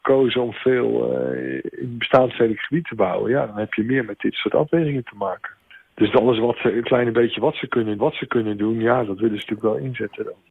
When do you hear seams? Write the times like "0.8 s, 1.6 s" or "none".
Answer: 8.0 s